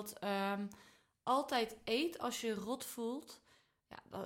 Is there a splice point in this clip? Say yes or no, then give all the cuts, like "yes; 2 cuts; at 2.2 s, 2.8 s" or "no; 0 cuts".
no; 0 cuts